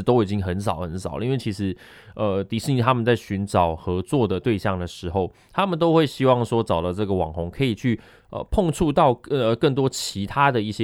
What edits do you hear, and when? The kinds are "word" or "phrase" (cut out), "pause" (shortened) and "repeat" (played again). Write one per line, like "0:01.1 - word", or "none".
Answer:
none